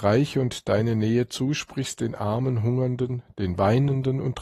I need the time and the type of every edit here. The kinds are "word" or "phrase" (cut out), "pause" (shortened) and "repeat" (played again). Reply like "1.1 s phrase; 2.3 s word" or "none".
none